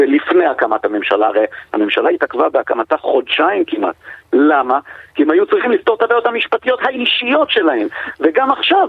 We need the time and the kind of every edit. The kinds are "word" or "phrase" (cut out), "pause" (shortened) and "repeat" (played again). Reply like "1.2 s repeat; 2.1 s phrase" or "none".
none